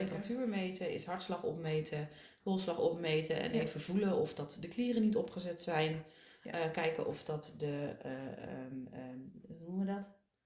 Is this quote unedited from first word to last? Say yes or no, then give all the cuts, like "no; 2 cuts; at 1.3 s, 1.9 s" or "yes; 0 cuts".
yes; 0 cuts